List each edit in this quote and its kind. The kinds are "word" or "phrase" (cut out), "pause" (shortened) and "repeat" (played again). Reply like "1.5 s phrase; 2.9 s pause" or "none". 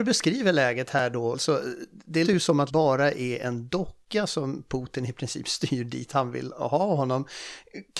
2.2 s word; 2.7 s phrase